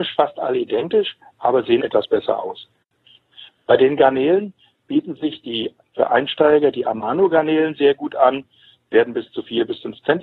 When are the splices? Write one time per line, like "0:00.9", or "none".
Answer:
0:01.8